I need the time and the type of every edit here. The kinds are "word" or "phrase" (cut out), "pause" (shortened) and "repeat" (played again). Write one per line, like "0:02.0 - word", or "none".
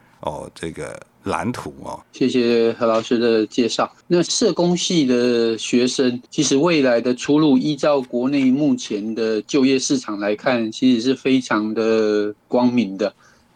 0:02.0 - pause
0:04.0 - pause
0:06.3 - pause